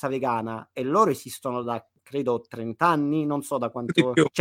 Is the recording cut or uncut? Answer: uncut